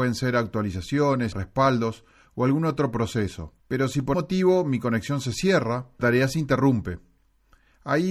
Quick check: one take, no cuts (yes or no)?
no